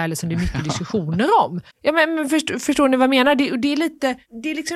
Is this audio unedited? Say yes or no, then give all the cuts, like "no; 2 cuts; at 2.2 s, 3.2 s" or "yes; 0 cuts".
no; 1 cut; at 1.7 s